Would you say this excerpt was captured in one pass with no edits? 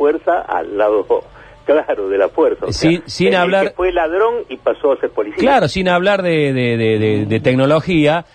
yes; 0 cuts

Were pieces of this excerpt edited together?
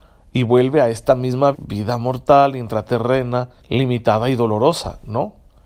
yes; 2 cuts; at 1.5 s, 3.6 s

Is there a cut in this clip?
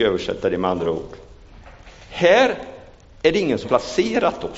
yes; 1 cut; at 3.6 s

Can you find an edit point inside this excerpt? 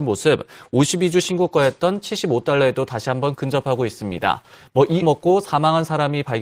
yes; 1 cut; at 5.0 s

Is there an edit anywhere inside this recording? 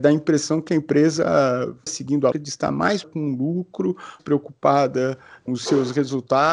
yes; 5 cuts; at 1.9 s, 2.3 s, 3.0 s, 4.2 s, 5.5 s

